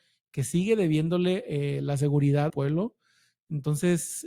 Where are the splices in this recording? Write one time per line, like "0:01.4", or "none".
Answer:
0:02.5